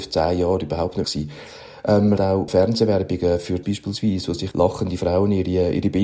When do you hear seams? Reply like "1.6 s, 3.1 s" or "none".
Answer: 1.0 s, 2.2 s, 2.5 s, 3.6 s, 4.5 s